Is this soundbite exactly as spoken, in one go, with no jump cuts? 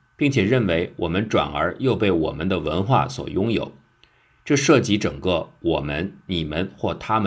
yes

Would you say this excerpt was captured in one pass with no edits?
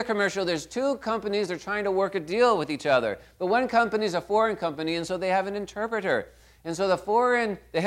yes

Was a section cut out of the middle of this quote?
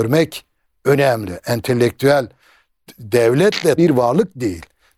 yes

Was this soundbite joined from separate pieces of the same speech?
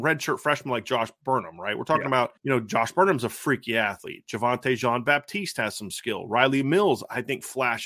yes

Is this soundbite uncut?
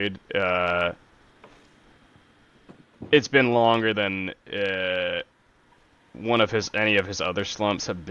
yes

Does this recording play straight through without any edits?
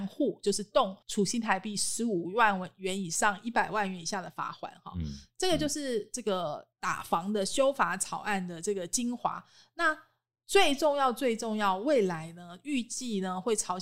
no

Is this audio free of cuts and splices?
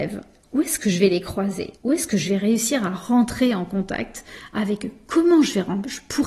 no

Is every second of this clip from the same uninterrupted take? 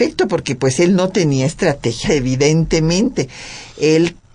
no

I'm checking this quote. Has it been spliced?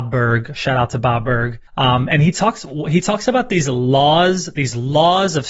yes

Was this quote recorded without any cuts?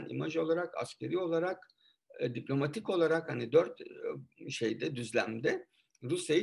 yes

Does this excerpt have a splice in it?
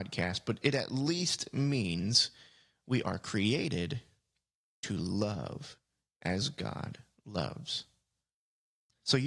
no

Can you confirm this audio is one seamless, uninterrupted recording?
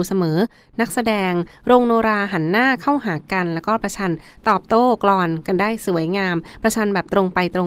yes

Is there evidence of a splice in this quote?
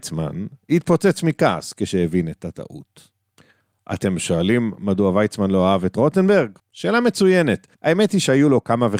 yes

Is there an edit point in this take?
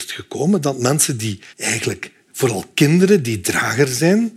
yes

